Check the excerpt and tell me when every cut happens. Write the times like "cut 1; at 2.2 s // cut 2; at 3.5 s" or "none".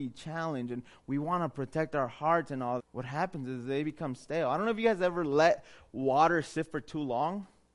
cut 1; at 2.8 s